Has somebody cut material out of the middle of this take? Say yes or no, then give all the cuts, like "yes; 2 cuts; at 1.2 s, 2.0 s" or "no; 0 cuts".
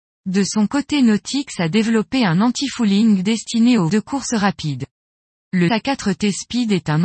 yes; 2 cuts; at 3.9 s, 5.7 s